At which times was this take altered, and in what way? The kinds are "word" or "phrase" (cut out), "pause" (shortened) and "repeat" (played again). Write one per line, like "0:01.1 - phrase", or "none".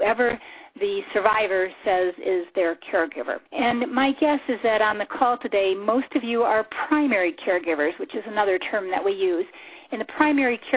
0:03.5 - pause